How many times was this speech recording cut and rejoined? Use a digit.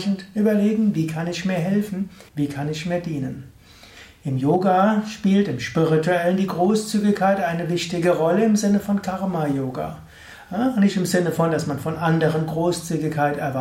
1